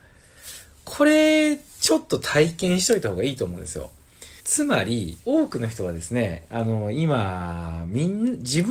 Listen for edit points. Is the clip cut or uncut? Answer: cut